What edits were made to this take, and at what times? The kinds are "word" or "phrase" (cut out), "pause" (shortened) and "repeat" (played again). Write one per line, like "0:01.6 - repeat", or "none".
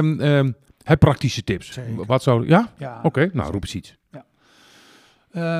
0:01.0 - word